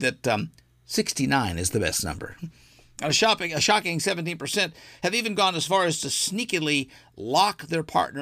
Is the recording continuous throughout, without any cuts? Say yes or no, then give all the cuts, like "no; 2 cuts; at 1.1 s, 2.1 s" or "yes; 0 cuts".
yes; 0 cuts